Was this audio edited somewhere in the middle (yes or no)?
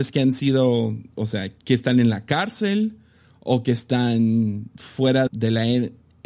yes